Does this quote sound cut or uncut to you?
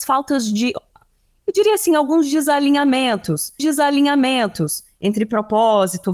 cut